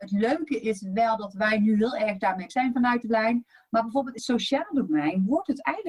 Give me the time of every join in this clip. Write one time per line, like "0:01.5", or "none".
0:02.5
0:03.0
0:04.2